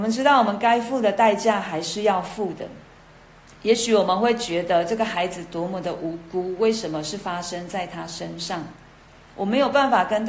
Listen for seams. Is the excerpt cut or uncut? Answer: uncut